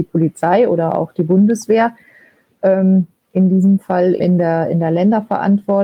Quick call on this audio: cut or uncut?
cut